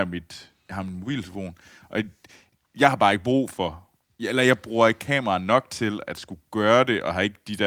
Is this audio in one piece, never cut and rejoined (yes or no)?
yes